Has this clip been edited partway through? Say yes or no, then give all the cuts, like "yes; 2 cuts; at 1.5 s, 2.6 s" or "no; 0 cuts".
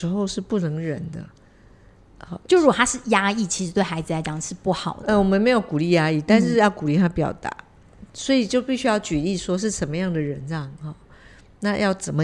no; 0 cuts